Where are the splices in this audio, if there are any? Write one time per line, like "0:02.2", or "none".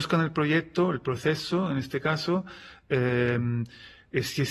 none